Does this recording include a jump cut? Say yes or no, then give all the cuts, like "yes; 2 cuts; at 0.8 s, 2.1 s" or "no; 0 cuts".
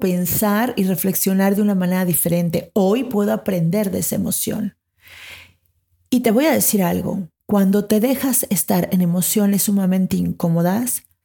no; 0 cuts